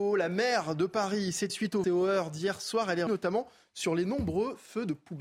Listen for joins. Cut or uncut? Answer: cut